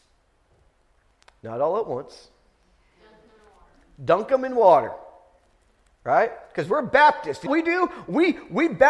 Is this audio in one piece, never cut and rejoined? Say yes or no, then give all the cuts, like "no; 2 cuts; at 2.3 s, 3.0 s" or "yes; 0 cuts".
no; 1 cut; at 7.5 s